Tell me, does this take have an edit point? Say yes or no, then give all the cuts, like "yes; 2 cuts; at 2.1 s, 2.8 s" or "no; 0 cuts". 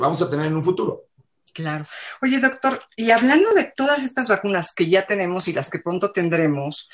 no; 0 cuts